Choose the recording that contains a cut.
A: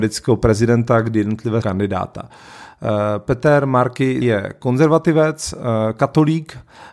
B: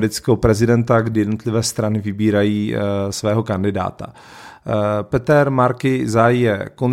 A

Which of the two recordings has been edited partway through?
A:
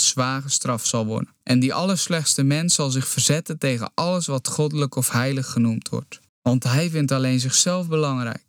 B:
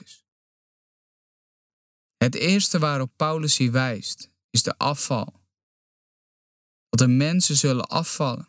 A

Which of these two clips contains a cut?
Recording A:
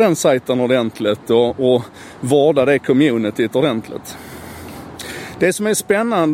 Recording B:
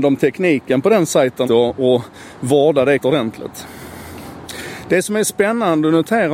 B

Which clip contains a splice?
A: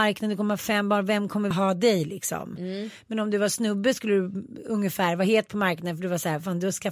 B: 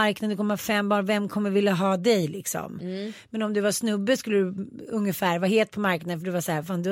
A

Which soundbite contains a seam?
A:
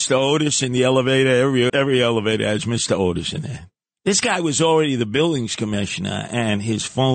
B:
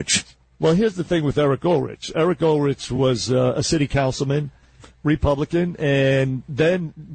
A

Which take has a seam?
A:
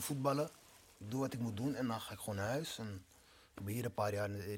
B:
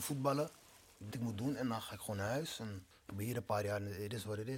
B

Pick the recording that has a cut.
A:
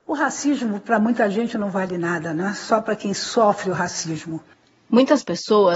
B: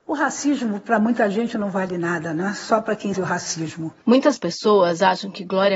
B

